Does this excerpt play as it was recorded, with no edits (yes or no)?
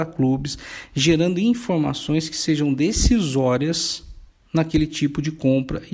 yes